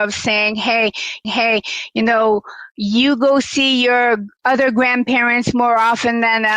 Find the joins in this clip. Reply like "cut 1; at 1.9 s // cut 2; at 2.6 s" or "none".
cut 1; at 1.2 s